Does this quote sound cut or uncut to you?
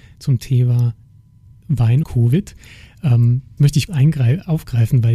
cut